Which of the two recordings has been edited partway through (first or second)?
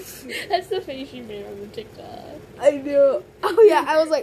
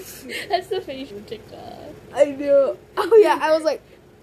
second